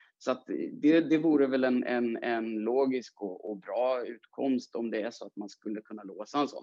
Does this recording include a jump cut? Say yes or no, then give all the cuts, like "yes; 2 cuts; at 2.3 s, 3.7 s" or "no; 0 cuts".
no; 0 cuts